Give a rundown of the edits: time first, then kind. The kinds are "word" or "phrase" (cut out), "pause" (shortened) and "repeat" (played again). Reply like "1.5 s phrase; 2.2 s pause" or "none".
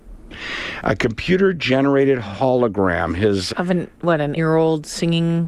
3.5 s word; 3.9 s pause; 4.4 s word